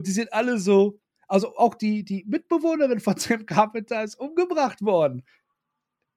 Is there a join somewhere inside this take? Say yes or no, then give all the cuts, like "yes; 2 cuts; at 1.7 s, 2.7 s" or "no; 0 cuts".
no; 0 cuts